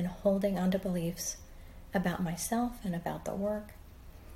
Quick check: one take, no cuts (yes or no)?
yes